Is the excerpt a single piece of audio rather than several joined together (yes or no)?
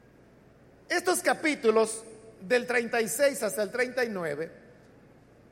yes